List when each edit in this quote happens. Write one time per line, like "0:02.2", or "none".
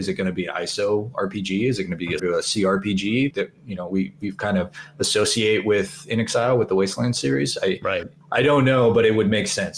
0:02.2
0:03.3